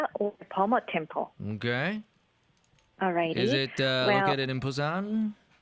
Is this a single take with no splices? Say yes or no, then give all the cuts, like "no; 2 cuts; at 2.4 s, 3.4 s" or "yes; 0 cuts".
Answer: yes; 0 cuts